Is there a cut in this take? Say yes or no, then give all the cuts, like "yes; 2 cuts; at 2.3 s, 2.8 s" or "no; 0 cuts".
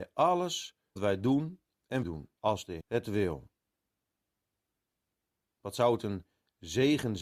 yes; 4 cuts; at 1.0 s, 2.0 s, 2.4 s, 2.8 s